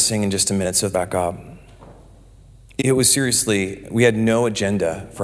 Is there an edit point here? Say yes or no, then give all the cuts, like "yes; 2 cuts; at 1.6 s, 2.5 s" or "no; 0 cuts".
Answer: yes; 2 cuts; at 0.9 s, 2.8 s